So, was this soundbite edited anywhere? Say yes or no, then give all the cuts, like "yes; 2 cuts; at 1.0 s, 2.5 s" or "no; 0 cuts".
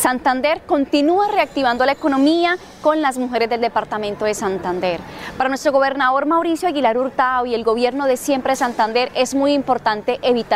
no; 0 cuts